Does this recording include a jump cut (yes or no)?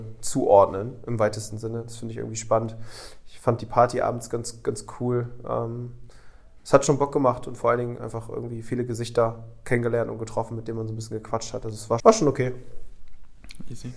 yes